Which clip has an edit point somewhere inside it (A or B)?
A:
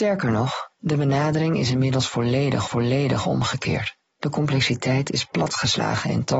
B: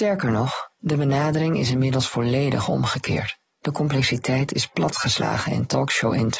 A